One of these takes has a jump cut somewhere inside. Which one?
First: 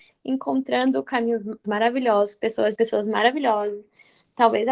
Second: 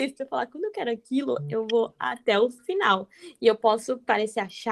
first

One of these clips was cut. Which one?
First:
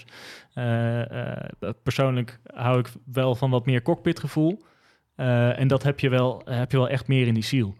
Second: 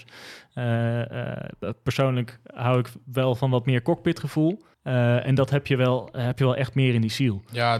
second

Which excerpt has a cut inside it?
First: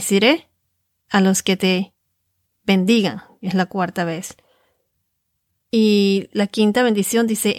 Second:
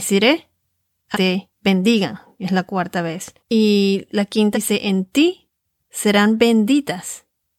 second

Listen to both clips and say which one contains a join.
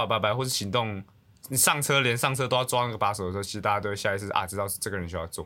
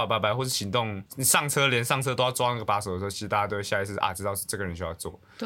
second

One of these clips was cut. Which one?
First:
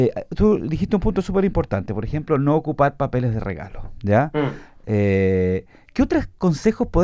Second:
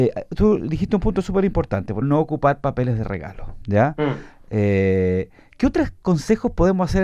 second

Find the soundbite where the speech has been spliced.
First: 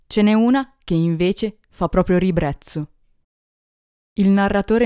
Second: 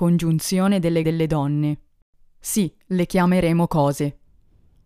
second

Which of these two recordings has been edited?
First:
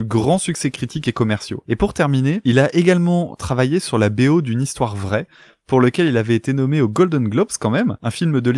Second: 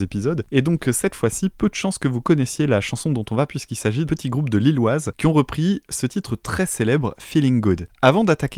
second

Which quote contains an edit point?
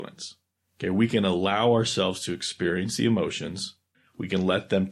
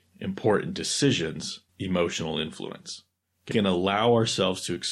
second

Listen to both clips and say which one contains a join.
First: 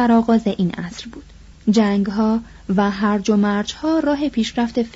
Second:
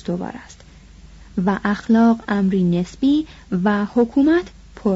first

